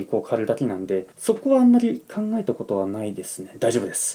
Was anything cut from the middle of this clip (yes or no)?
yes